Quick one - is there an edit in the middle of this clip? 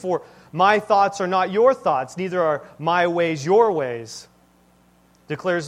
no; 0 cuts

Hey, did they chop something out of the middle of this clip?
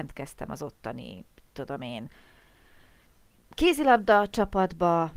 no; 0 cuts

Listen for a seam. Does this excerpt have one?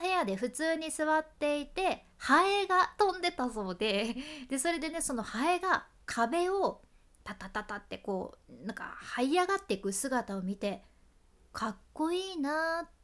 yes; 1 cut; at 2.1 s

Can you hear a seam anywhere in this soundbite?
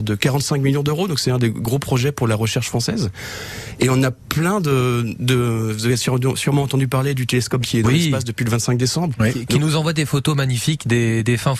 yes; 1 cut; at 7.6 s

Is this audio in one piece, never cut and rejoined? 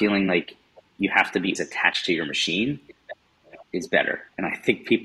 no; 1 cut; at 1.6 s

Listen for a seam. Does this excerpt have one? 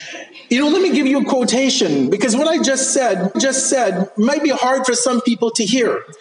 yes; 1 cut; at 3.3 s

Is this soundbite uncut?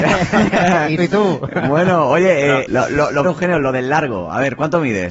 no; 3 cuts; at 1.0 s, 2.7 s, 3.2 s

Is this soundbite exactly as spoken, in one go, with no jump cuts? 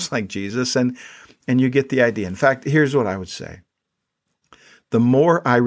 yes; 0 cuts

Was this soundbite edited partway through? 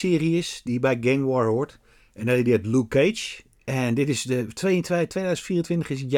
no; 0 cuts

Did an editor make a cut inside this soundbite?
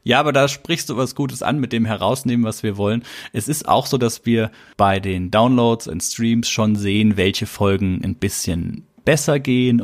no; 0 cuts

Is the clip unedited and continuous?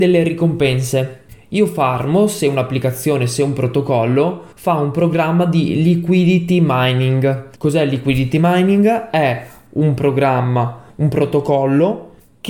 no; 3 cuts; at 4.5 s, 7.5 s, 10.9 s

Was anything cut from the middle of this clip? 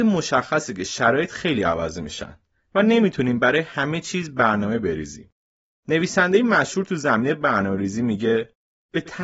no; 0 cuts

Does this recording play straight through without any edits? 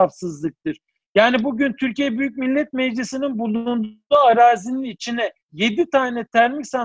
no; 1 cut; at 5.4 s

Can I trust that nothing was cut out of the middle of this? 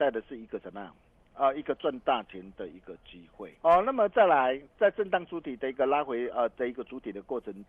no; 1 cut; at 3.6 s

